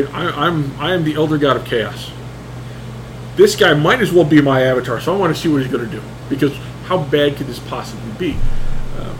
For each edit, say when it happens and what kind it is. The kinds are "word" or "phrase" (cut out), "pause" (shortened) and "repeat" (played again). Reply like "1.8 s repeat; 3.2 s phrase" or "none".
none

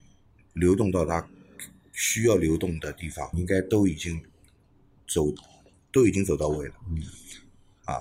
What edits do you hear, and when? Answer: 3.3 s word

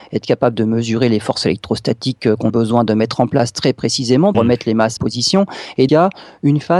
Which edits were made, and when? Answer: 2.5 s word; 4.3 s word; 5.0 s phrase; 5.9 s word

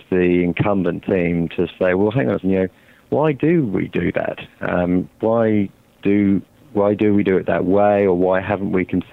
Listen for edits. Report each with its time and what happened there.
2.4 s word

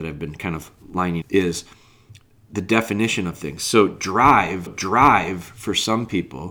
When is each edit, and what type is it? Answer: 1.2 s word; 4.7 s repeat

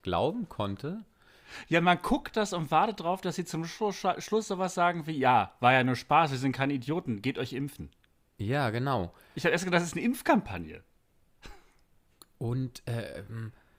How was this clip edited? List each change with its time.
none

